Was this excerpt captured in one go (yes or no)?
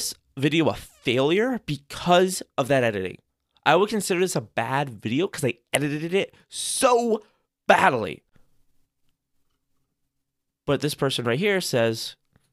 yes